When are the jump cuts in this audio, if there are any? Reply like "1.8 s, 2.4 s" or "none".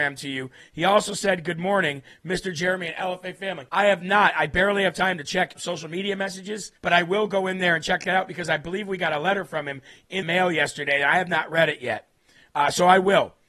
3.7 s, 5.6 s, 6.8 s, 10.2 s